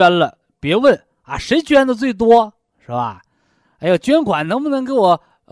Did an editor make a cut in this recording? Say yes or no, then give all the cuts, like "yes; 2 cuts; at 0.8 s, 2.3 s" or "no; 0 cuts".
no; 0 cuts